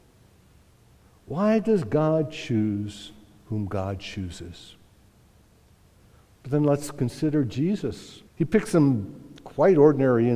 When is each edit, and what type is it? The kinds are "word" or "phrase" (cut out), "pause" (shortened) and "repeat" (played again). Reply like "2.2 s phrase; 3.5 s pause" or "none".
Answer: 8.3 s pause